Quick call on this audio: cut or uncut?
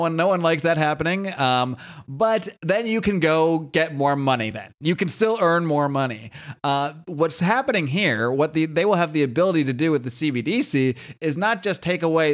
uncut